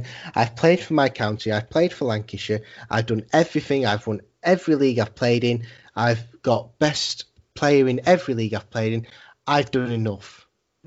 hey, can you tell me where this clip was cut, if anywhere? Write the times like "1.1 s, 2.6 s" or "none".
none